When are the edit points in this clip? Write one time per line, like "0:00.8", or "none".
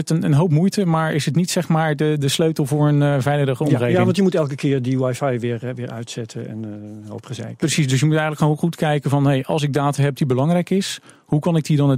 none